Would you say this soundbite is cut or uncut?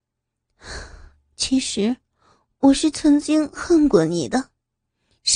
uncut